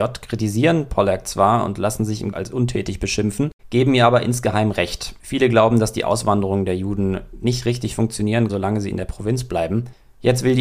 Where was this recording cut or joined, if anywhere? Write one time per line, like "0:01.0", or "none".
0:02.3
0:03.6
0:05.2
0:08.5